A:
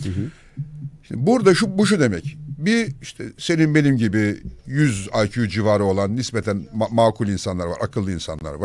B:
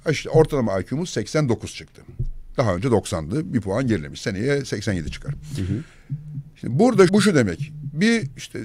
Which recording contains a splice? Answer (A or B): B